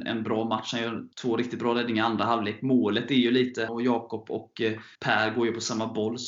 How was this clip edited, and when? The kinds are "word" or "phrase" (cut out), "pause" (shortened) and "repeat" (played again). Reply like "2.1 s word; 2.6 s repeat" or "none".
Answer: 1.1 s pause; 3.7 s word; 5.0 s pause